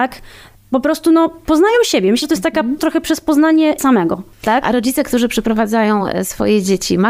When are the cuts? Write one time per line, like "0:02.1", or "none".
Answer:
0:02.2
0:02.8
0:03.8